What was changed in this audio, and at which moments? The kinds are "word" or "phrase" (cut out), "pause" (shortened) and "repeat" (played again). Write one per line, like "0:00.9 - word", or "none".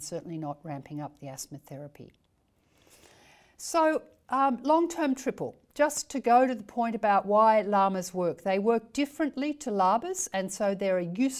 none